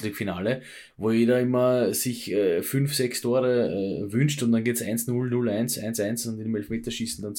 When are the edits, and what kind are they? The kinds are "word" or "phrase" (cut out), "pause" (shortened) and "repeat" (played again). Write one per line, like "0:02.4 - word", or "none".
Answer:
none